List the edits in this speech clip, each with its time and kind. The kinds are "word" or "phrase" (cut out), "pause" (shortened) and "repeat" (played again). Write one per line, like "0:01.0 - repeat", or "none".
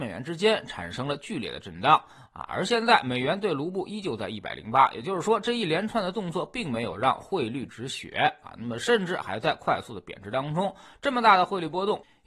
none